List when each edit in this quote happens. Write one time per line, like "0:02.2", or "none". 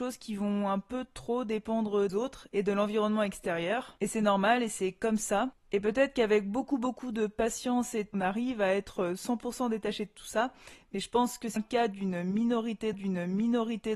0:02.1
0:08.1
0:11.6
0:12.9